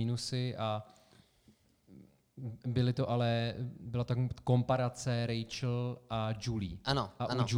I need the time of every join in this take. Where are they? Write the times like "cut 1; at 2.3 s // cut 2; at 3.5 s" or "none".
none